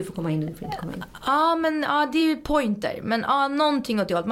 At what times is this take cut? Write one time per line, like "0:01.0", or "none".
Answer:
none